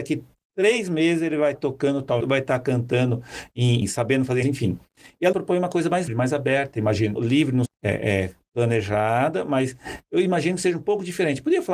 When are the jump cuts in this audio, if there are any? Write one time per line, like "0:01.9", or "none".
0:01.5
0:02.2
0:03.8
0:04.4
0:05.3
0:06.1
0:07.2
0:07.7